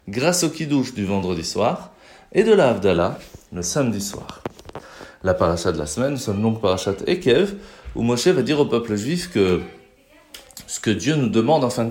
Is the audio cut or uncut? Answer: uncut